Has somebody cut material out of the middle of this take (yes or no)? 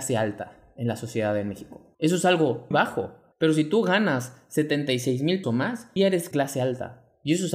yes